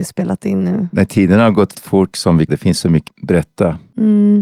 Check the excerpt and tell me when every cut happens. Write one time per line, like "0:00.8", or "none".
0:01.7
0:02.1
0:02.5
0:03.1